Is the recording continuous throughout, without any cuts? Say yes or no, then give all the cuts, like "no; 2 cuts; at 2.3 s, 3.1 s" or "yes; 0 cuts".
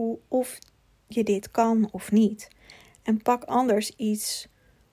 yes; 0 cuts